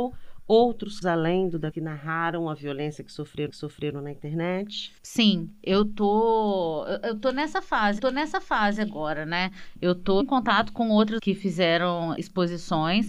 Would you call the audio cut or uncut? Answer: cut